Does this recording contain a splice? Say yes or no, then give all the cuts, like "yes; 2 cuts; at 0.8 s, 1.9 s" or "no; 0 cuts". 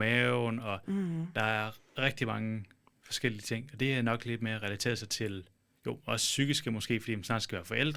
no; 0 cuts